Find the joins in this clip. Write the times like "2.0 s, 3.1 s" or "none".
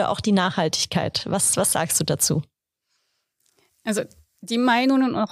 none